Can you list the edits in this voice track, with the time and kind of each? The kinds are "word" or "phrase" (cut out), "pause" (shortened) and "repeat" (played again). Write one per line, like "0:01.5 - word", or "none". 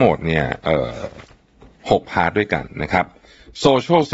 none